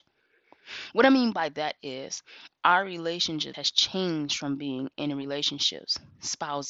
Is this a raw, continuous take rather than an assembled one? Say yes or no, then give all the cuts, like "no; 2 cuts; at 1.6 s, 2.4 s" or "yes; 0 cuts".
no; 1 cut; at 3.5 s